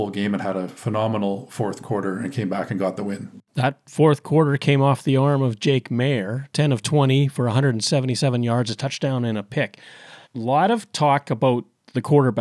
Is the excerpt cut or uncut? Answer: cut